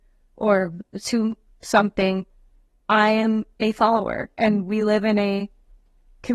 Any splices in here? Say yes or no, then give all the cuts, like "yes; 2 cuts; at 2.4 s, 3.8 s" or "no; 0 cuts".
no; 0 cuts